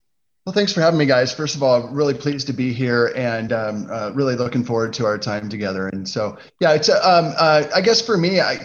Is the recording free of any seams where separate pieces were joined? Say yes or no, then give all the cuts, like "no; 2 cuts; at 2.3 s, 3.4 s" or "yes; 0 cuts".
yes; 0 cuts